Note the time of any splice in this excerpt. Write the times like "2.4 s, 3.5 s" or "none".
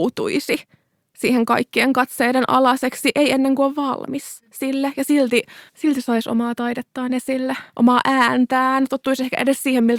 4.5 s, 5.7 s, 7.7 s